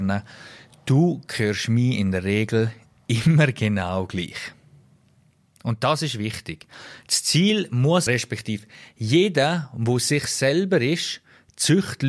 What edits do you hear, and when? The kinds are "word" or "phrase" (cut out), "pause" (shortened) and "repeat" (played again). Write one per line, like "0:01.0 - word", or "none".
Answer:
0:08.1 - phrase